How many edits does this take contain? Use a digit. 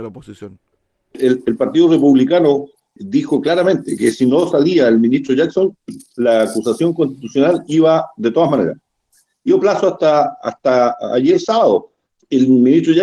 1